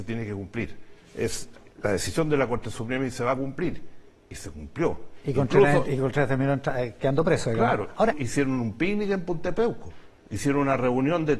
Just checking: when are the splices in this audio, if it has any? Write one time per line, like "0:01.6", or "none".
0:01.7
0:08.1